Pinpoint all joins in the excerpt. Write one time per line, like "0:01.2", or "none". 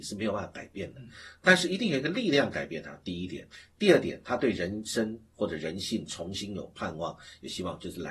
none